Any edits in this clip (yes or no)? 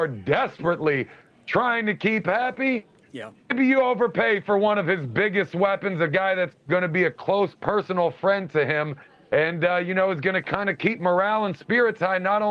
no